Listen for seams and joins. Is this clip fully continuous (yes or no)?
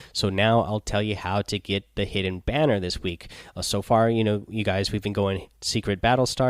yes